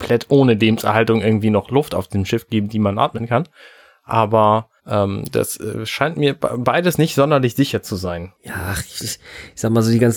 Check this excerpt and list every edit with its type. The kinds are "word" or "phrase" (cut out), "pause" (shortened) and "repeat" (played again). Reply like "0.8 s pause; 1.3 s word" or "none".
4.8 s pause; 8.3 s pause